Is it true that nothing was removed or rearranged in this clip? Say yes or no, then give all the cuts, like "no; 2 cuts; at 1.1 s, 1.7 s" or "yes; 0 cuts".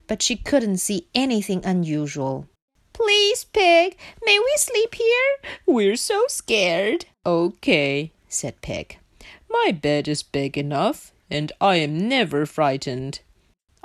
no; 2 cuts; at 2.7 s, 7.1 s